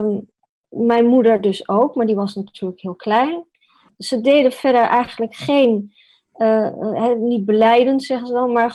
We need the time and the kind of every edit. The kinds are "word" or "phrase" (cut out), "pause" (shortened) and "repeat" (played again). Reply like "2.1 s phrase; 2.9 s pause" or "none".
none